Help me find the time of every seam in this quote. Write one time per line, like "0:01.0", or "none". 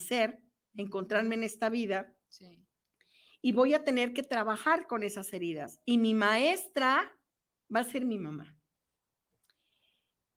none